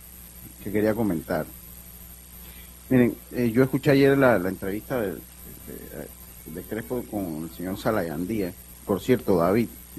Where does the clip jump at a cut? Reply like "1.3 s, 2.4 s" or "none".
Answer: none